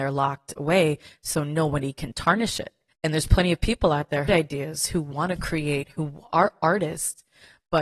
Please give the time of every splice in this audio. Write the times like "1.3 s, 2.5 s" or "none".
4.3 s